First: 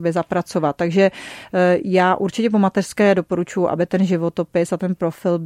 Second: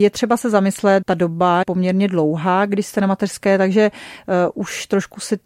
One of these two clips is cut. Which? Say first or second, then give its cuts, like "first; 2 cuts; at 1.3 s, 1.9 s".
second; 2 cuts; at 1.0 s, 1.6 s